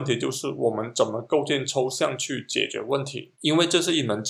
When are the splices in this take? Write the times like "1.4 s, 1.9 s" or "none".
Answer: 3.3 s